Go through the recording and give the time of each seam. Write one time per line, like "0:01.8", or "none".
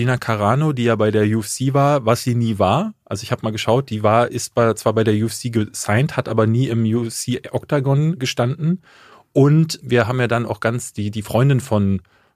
none